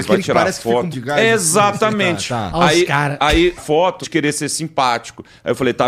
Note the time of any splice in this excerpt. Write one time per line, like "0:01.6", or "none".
0:00.9
0:03.6
0:04.0